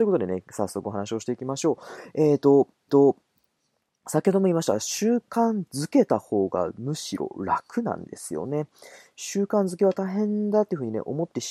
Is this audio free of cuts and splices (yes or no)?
no